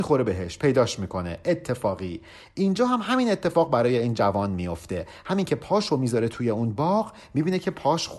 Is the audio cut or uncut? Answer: uncut